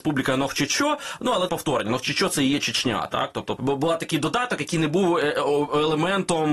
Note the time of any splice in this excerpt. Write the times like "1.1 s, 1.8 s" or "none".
1.5 s, 3.6 s